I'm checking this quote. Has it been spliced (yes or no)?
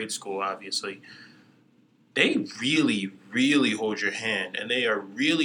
no